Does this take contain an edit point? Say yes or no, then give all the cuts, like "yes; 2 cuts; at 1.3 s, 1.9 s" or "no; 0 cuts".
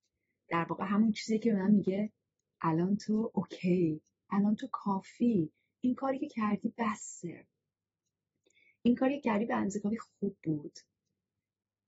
no; 0 cuts